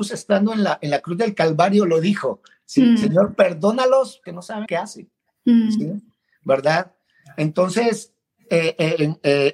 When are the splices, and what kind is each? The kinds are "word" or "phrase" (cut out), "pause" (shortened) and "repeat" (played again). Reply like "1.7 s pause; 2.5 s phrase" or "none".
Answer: 4.3 s word; 4.7 s word